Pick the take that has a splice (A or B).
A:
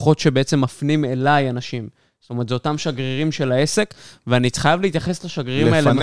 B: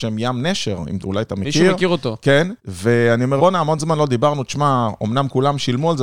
B